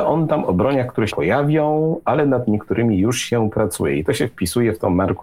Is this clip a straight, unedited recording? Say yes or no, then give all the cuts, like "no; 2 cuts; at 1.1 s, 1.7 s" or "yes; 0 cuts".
no; 1 cut; at 1.1 s